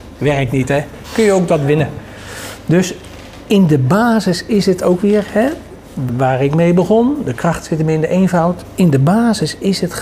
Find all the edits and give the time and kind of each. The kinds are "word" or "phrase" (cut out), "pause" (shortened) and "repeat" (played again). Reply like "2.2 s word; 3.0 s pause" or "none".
1.5 s word; 6.1 s word

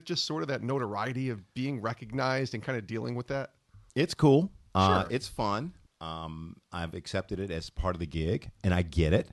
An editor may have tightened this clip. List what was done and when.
1.5 s pause; 3.9 s pause; 4.7 s pause; 5.9 s pause

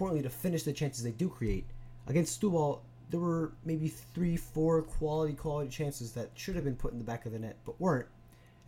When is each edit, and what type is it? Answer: none

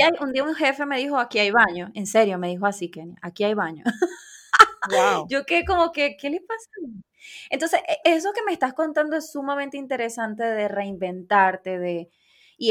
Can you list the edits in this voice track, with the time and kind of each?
8.0 s word

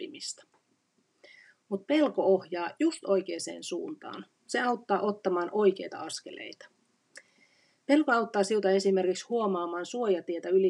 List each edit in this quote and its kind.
none

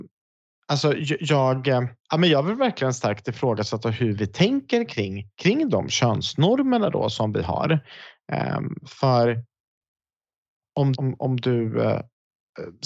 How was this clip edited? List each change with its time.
2.0 s pause; 4.2 s phrase; 5.3 s pause; 10.9 s word

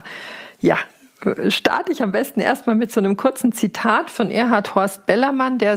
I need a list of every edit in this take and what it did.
none

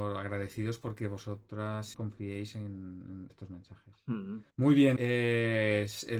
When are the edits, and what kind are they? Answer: 1.9 s phrase; 3.3 s phrase; 4.5 s pause; 5.0 s word

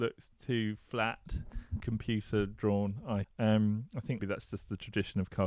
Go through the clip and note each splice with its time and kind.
1.8 s word; 3.2 s word; 4.2 s word

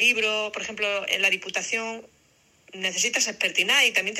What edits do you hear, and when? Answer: none

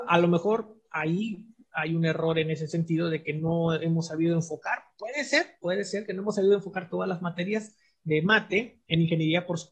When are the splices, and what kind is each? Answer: none

